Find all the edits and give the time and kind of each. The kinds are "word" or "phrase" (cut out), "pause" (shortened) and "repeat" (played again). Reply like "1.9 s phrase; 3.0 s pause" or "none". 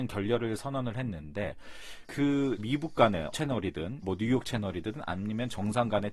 2.0 s word; 2.6 s word; 3.3 s word; 4.0 s word